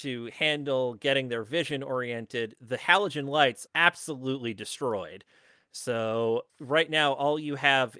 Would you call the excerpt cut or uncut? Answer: cut